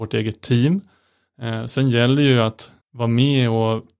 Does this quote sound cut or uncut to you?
cut